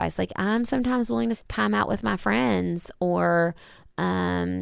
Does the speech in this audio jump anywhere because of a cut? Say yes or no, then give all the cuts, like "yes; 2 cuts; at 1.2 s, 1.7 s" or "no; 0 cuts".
yes; 1 cut; at 1.3 s